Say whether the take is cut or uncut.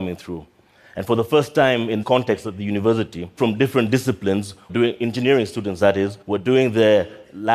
cut